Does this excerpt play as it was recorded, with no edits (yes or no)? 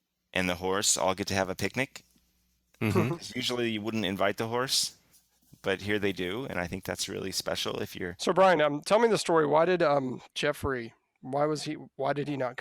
yes